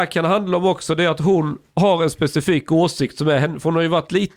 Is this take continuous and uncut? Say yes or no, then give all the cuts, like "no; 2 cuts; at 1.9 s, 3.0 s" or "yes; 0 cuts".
yes; 0 cuts